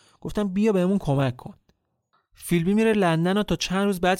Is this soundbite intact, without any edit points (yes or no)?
yes